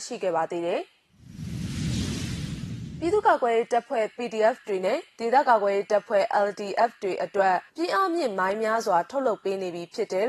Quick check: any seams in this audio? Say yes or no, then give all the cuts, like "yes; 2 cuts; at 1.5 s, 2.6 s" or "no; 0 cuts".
yes; 1 cut; at 7.7 s